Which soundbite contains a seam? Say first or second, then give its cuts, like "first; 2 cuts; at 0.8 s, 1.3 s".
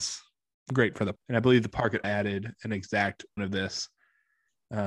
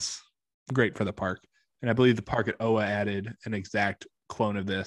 first; 3 cuts; at 1.2 s, 2.0 s, 3.4 s